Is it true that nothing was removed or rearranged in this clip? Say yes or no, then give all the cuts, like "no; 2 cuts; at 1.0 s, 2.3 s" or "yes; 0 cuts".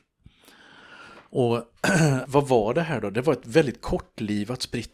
no; 1 cut; at 2.2 s